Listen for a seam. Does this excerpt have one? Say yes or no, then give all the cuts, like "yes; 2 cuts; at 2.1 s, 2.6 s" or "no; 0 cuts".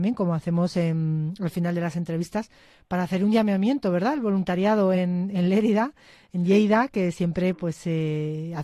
no; 0 cuts